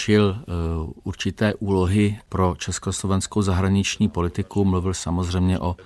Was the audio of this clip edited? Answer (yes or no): no